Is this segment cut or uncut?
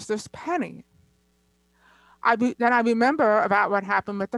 uncut